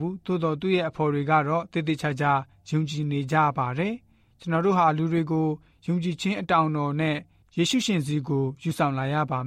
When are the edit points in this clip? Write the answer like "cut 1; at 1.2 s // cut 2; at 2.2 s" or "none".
none